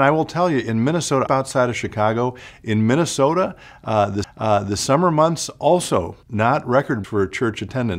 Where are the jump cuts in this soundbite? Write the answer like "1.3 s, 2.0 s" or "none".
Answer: 1.3 s, 4.2 s, 6.2 s, 7.0 s